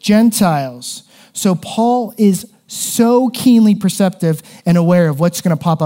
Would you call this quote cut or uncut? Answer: uncut